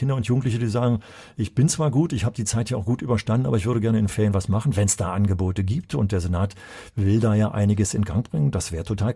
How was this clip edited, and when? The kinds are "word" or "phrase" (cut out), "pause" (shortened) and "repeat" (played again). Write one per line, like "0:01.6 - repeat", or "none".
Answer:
none